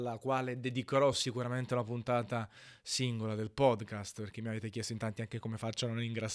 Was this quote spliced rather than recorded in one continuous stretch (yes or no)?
no